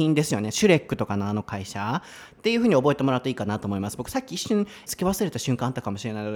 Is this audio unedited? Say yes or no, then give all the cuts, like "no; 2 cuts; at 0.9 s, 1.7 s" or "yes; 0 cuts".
no; 1 cut; at 4.9 s